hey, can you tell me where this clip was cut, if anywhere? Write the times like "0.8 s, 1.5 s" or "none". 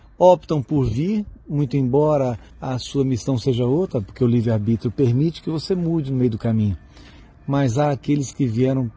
2.5 s